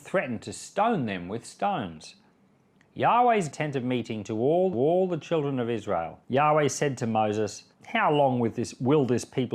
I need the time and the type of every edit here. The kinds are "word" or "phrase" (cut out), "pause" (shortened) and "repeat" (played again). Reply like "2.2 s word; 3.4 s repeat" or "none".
3.5 s phrase; 4.7 s repeat; 6.2 s pause; 7.7 s pause